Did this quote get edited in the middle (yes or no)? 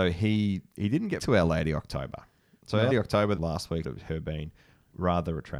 yes